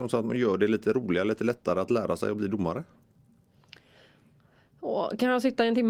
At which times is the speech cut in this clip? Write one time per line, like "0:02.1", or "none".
none